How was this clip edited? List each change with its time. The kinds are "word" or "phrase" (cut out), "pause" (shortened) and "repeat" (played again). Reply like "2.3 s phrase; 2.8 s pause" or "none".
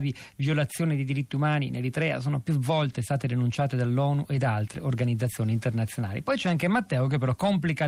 none